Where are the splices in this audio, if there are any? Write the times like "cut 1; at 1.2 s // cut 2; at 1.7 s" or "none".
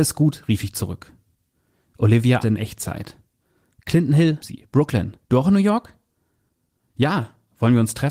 cut 1; at 2.4 s // cut 2; at 4.4 s // cut 3; at 5.2 s